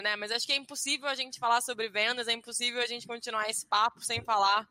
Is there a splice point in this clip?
no; 0 cuts

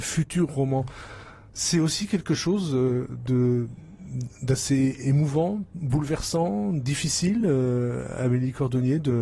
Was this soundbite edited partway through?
no; 0 cuts

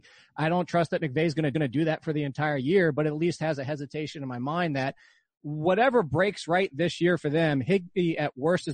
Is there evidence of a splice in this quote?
yes; 1 cut; at 1.5 s

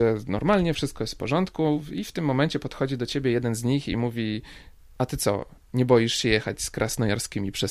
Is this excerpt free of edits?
yes; 0 cuts

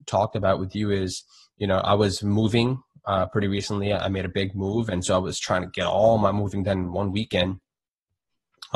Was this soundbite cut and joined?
no; 0 cuts

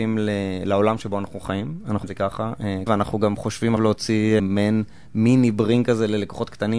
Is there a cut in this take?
yes; 4 cuts; at 2.0 s, 2.9 s, 3.8 s, 4.4 s

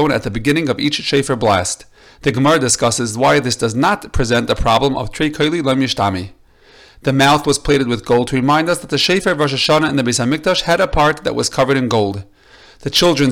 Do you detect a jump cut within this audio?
no; 0 cuts

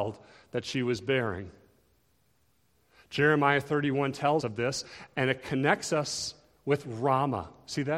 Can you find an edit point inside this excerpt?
yes; 1 cut; at 4.4 s

